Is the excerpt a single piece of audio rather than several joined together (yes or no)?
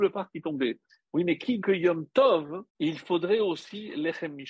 no